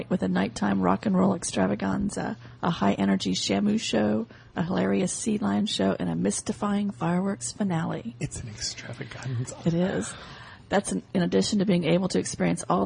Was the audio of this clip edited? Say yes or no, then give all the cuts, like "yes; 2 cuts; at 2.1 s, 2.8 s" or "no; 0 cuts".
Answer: no; 0 cuts